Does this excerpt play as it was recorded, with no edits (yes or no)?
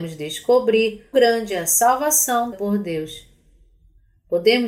no